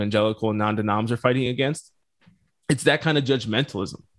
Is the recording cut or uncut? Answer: uncut